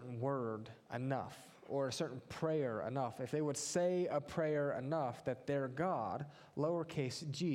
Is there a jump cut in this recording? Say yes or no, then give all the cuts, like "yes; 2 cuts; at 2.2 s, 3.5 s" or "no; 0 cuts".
no; 0 cuts